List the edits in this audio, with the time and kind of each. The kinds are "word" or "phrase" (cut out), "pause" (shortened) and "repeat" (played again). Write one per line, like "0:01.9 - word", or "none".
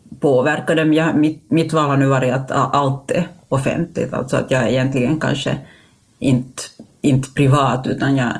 none